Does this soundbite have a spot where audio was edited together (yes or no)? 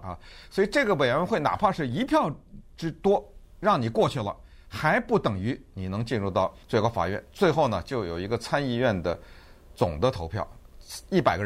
yes